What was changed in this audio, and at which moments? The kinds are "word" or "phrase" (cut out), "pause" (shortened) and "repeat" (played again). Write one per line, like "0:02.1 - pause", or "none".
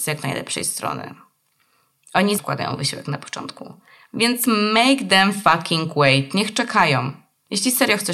0:02.4 - word